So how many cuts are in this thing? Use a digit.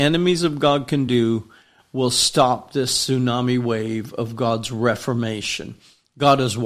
0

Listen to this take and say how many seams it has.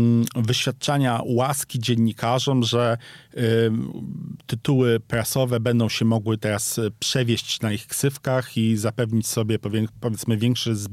0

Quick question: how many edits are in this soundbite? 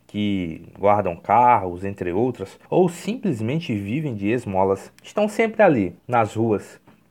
3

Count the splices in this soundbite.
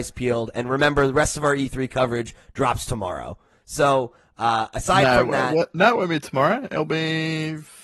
0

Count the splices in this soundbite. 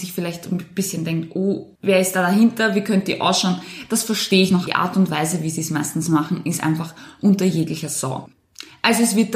2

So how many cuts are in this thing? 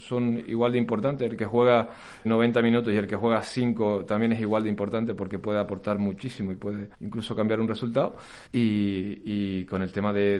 3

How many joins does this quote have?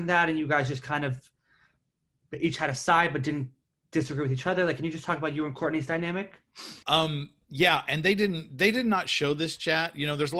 1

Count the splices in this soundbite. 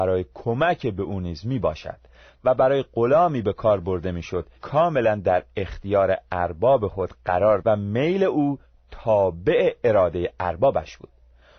2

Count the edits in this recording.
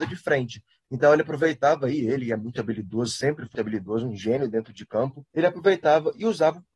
2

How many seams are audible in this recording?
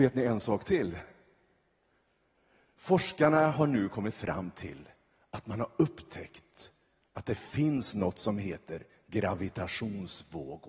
0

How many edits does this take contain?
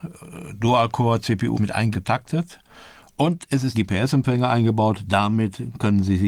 3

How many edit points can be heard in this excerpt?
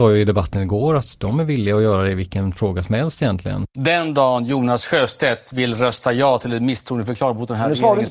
0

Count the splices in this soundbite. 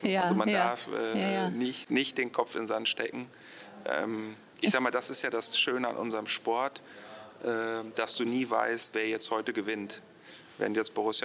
0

